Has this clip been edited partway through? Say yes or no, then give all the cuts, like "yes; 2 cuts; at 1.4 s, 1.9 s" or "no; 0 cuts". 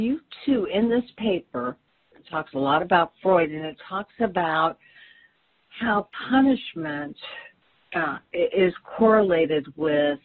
no; 0 cuts